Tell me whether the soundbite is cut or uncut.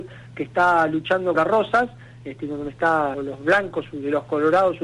cut